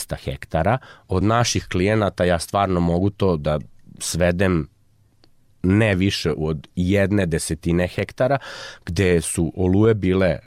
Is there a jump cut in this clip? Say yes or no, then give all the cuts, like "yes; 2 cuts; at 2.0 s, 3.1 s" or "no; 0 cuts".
no; 0 cuts